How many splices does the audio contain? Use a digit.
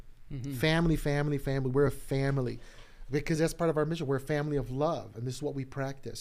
0